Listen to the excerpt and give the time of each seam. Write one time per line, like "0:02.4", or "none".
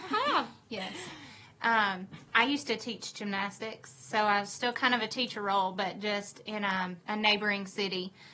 0:07.0